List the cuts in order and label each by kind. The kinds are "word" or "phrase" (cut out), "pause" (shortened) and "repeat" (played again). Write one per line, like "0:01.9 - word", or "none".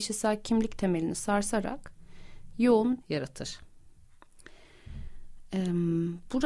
0:03.0 - phrase